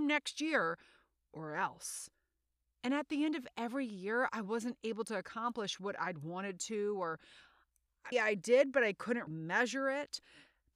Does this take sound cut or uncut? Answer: cut